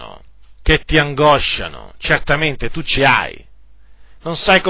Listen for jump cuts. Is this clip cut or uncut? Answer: cut